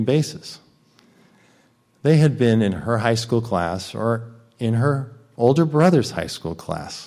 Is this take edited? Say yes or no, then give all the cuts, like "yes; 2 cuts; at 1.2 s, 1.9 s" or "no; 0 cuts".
no; 0 cuts